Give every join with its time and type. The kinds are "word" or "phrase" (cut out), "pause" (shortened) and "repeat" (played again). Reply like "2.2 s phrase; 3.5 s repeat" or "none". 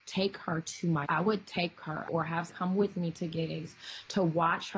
1.0 s word; 2.1 s phrase; 2.5 s word